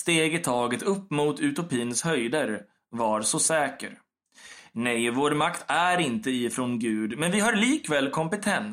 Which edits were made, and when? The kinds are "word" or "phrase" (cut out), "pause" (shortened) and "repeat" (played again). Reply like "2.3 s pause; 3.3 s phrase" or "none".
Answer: none